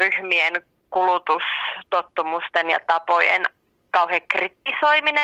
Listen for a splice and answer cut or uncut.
uncut